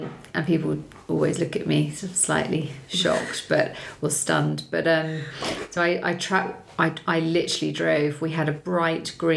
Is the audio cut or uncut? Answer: uncut